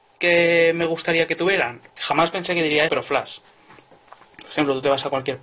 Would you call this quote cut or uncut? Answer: cut